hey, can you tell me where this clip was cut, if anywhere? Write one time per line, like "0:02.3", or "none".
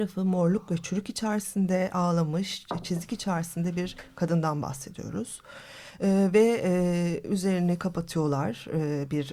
none